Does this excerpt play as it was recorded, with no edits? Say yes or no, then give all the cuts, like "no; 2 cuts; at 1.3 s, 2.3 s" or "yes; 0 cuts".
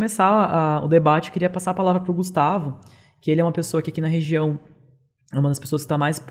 yes; 0 cuts